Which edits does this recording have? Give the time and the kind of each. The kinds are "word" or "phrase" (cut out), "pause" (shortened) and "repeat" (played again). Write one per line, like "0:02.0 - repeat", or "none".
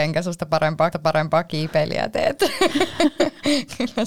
0:00.9 - repeat